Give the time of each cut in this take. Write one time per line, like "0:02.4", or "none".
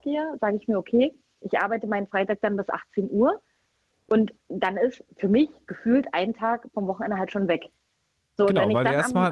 none